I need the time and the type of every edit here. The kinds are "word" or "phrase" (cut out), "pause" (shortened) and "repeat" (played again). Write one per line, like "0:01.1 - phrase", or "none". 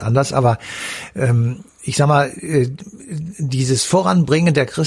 none